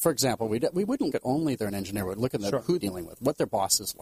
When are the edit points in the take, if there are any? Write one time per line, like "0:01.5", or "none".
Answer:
0:01.1
0:01.6
0:02.8